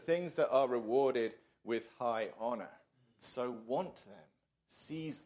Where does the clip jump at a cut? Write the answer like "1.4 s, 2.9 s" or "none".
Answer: none